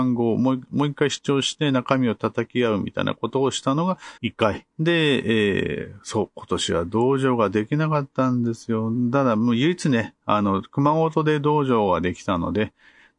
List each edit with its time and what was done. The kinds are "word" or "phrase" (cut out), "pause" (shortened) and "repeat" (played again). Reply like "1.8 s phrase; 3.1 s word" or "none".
4.2 s pause; 4.7 s pause